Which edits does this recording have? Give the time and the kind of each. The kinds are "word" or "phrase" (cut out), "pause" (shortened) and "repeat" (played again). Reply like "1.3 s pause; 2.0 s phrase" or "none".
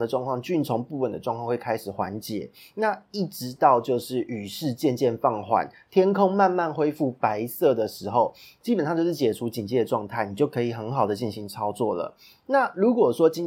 none

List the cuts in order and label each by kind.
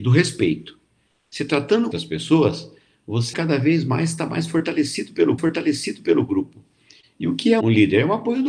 1.9 s phrase; 3.3 s word; 5.4 s repeat; 7.6 s word

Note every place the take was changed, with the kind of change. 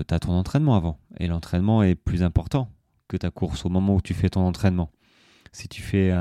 none

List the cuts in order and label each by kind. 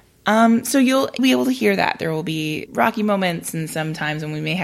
1.2 s word; 2.7 s word

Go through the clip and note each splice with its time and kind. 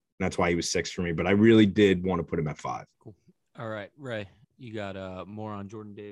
2.9 s pause; 4.4 s pause

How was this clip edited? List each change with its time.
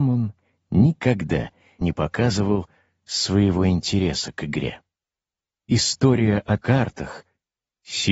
1.8 s word; 6.6 s word

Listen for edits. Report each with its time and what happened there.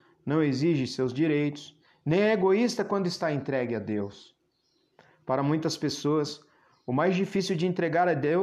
none

